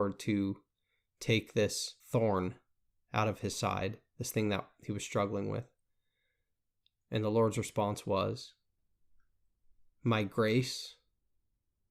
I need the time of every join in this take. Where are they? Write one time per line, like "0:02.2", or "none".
0:02.0